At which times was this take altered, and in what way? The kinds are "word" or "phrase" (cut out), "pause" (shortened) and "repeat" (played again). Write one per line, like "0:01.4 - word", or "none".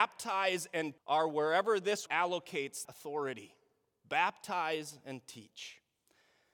0:01.0 - word
0:02.1 - word
0:02.8 - word

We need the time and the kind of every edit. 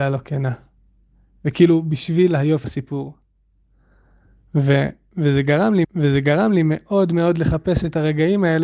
0:02.6 - word
0:05.8 - repeat

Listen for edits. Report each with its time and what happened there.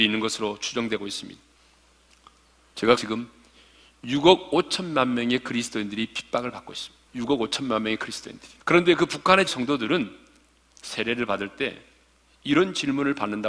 0:03.0 - phrase
0:07.1 - pause
0:08.6 - pause
0:09.5 - word

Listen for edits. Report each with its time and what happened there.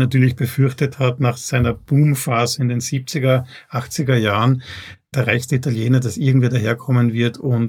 0:05.1 - phrase

